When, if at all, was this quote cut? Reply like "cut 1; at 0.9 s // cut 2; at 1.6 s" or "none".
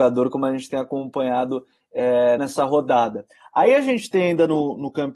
cut 1; at 2.4 s